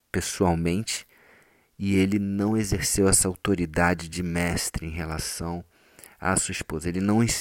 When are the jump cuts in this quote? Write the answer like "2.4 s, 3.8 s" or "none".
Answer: none